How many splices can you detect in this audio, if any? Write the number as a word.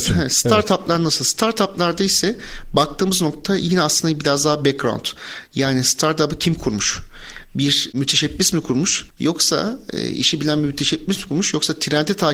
one